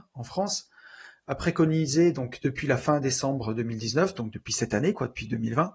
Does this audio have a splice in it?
no; 0 cuts

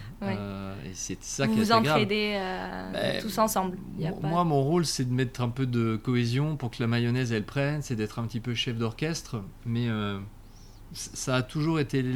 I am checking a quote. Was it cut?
no; 0 cuts

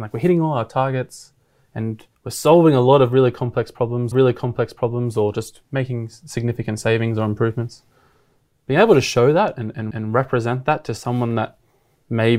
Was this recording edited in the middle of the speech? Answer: yes; 3 cuts; at 2.1 s, 4.1 s, 9.9 s

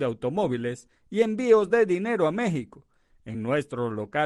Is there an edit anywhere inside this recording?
no; 0 cuts

